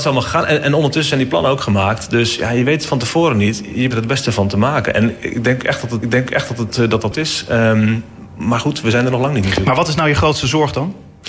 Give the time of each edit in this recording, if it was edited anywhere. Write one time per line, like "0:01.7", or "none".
0:03.9
0:06.0
0:07.1